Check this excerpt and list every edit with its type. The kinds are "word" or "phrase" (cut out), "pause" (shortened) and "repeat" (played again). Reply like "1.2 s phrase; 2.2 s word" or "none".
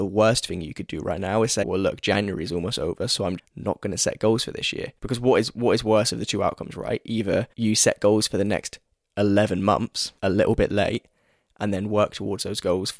1.6 s word; 3.4 s word; 5.0 s pause; 7.5 s pause; 10.2 s pause